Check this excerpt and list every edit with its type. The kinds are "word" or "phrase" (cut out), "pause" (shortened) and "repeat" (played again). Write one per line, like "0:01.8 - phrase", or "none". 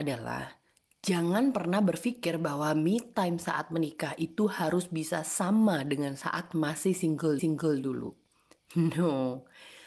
0:07.4 - repeat